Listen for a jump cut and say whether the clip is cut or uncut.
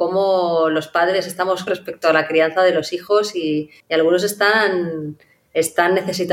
cut